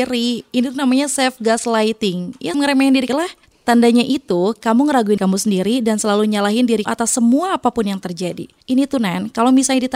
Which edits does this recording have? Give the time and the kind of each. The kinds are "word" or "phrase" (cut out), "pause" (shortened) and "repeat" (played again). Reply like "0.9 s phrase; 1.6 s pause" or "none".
2.5 s word; 3.1 s phrase; 5.2 s word; 6.8 s word

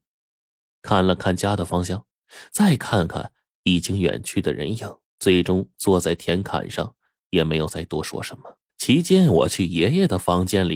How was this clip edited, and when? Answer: 5.1 s pause; 8.7 s pause

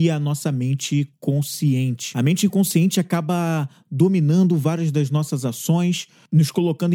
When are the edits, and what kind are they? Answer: none

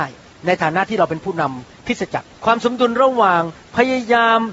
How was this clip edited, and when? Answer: 2.4 s pause

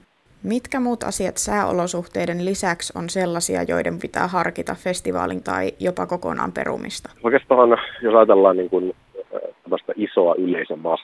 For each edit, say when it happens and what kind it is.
4.0 s word; 5.4 s word; 7.2 s pause

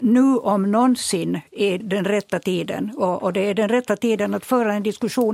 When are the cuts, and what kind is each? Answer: 1.8 s word

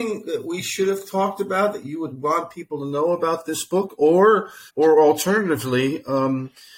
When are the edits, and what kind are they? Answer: 4.7 s pause

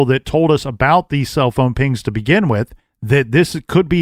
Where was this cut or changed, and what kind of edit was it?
2.8 s pause

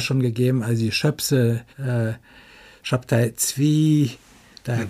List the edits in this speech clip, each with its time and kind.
1.7 s pause

